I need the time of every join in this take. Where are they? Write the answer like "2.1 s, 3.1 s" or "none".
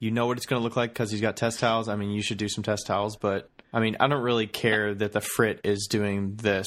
3.6 s